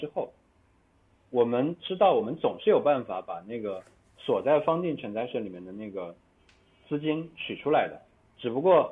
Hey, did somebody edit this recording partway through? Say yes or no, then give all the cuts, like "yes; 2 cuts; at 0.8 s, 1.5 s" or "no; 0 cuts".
no; 0 cuts